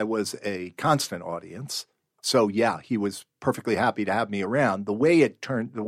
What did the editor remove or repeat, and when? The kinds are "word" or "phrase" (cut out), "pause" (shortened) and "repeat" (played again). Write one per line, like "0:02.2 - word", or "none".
none